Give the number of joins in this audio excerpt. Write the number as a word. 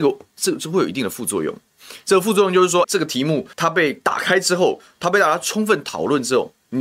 two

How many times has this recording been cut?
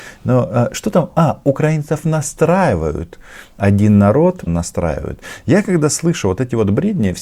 one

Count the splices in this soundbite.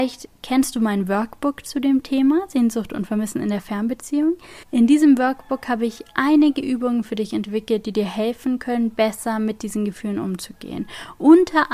one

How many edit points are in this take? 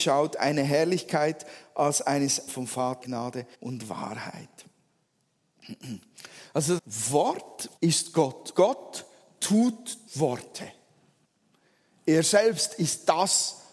seven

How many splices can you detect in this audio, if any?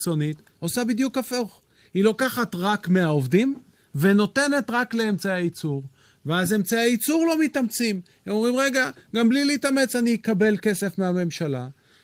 zero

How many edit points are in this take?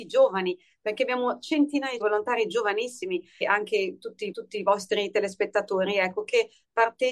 three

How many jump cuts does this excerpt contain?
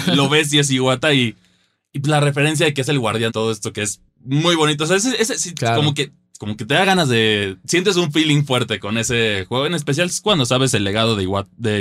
one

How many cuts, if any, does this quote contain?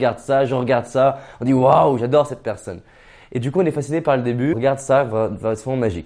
one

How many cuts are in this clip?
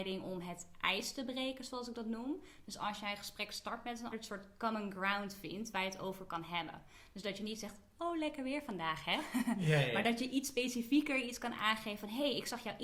one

